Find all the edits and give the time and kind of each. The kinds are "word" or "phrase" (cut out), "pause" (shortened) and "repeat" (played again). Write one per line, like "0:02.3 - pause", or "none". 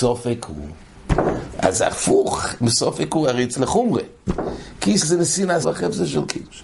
0:03.6 - word
0:05.0 - word
0:05.6 - phrase